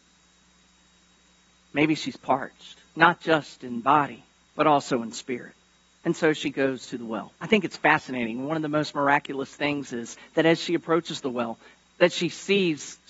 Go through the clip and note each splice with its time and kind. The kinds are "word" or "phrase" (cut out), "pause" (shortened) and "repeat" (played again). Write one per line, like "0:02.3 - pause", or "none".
0:02.9 - pause
0:04.4 - pause
0:05.7 - pause
0:07.3 - pause

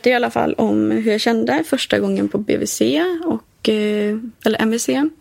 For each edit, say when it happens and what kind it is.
none

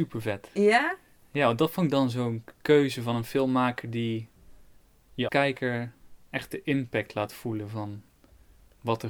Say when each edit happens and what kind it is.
0:05.3 - word

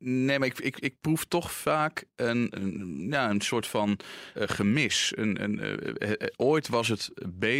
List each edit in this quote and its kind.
0:02.5 - word
0:04.4 - word

